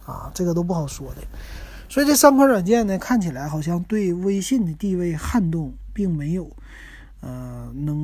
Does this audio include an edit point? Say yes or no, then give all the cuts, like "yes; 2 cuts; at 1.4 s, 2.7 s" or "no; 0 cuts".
no; 0 cuts